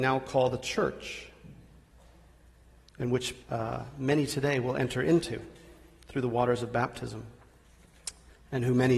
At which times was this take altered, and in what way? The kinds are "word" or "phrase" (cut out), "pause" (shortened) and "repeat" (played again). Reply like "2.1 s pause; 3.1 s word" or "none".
3.4 s pause